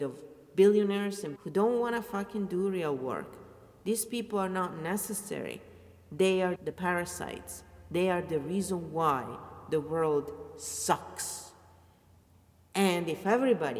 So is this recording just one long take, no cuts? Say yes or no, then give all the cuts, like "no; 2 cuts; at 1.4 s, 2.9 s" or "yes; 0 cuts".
no; 2 cuts; at 1.4 s, 6.6 s